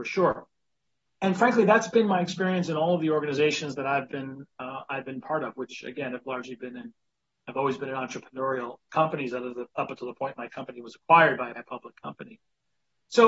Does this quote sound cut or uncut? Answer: cut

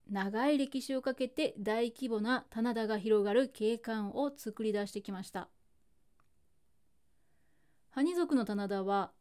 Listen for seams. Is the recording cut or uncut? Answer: uncut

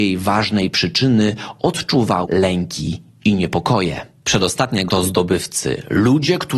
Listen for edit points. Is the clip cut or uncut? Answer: cut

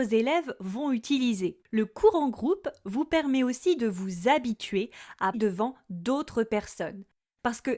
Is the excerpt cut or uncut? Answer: cut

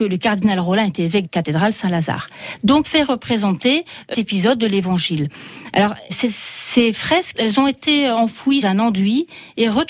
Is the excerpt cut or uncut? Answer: cut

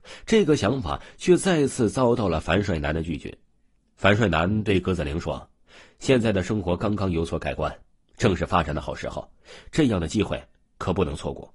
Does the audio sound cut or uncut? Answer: cut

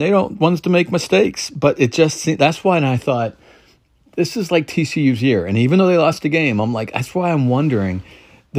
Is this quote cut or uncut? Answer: uncut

